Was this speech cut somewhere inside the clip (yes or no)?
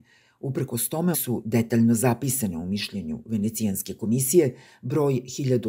yes